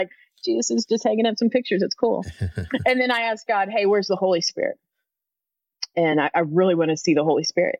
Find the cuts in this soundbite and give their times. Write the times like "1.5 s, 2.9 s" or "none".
none